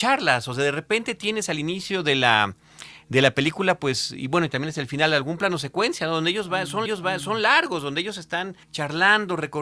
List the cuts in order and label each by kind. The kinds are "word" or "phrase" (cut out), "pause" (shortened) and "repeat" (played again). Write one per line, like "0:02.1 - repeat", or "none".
0:06.9 - repeat
0:08.6 - pause